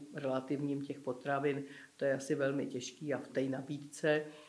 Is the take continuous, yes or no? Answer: no